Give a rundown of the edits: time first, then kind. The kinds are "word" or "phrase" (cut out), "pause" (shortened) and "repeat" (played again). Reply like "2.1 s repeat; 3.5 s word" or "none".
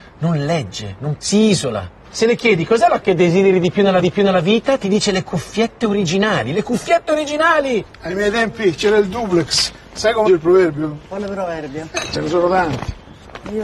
1.2 s word; 3.0 s word; 4.0 s repeat; 10.3 s word